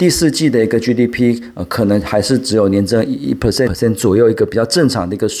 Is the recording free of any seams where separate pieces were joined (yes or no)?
no